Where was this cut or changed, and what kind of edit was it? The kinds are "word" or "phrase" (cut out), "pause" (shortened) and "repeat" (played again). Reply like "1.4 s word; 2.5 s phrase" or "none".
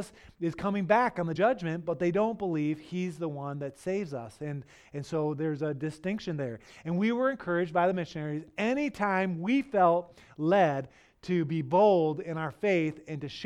1.4 s phrase